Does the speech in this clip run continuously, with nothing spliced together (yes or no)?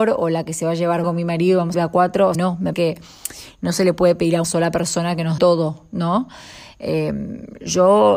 no